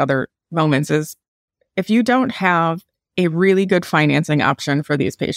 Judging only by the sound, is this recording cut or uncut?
uncut